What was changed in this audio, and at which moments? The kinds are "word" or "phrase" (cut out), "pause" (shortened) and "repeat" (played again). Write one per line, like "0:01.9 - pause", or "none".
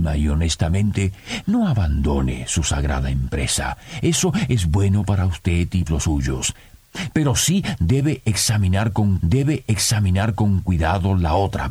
0:05.9 - phrase
0:09.2 - repeat